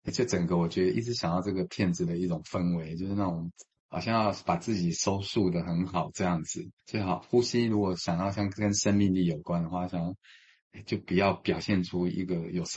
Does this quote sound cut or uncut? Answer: cut